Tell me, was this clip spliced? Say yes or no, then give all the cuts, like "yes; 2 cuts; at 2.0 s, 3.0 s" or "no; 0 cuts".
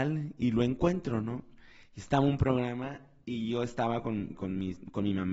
no; 0 cuts